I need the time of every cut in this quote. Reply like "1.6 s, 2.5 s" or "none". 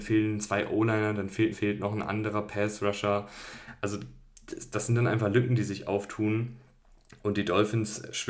1.5 s